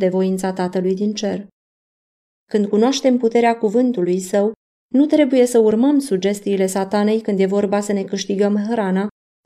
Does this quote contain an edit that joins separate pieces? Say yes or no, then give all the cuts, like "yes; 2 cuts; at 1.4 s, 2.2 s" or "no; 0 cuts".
no; 0 cuts